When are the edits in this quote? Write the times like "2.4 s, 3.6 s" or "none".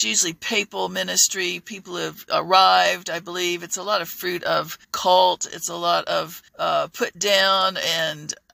4.8 s, 6.5 s